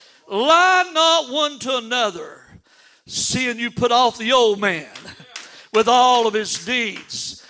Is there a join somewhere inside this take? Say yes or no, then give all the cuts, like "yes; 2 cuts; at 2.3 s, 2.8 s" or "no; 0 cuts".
no; 0 cuts